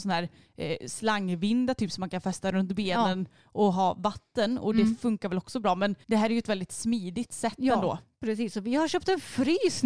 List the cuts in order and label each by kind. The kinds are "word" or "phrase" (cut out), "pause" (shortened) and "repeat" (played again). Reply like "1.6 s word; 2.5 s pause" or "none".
6.0 s pause